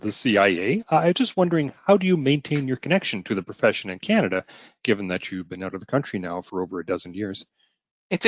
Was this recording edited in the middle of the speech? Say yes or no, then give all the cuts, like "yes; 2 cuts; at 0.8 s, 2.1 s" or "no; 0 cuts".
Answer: no; 0 cuts